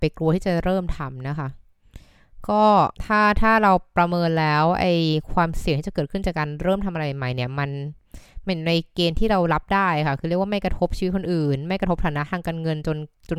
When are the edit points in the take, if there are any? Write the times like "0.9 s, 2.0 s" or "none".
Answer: 2.9 s